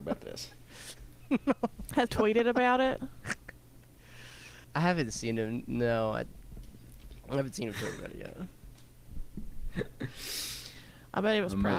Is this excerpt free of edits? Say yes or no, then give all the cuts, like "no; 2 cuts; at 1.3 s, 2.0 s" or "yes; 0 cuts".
no; 2 cuts; at 2.1 s, 4.6 s